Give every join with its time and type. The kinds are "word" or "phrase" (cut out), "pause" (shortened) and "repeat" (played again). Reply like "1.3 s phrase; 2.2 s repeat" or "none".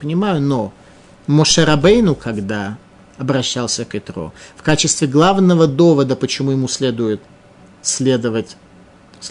none